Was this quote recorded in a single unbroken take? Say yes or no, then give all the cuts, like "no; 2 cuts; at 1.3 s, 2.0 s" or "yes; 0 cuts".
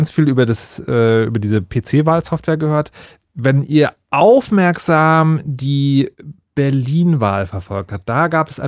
yes; 0 cuts